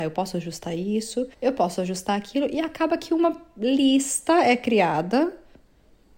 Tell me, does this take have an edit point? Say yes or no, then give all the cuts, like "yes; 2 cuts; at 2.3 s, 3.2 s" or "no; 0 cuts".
yes; 1 cut; at 1.3 s